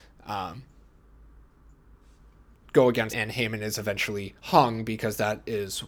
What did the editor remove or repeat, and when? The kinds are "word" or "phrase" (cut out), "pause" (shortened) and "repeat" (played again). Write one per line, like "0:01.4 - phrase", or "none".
0:03.1 - word
0:04.4 - pause